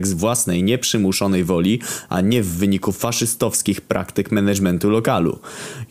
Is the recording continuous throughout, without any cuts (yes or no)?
yes